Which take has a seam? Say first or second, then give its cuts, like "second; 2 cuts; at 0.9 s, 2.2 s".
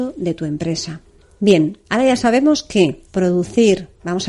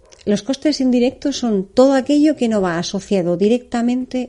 first; 2 cuts; at 1.2 s, 3.1 s